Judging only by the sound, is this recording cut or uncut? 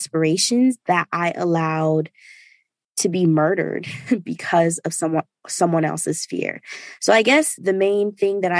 cut